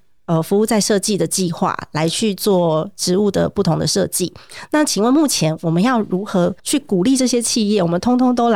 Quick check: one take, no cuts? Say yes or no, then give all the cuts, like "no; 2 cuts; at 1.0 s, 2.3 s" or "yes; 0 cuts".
no; 1 cut; at 6.6 s